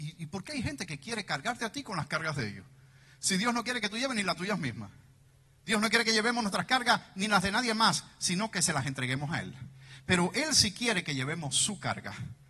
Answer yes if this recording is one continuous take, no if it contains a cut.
yes